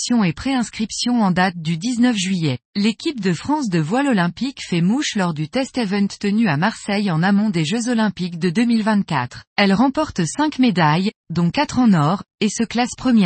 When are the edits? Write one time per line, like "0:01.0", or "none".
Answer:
0:02.7
0:09.5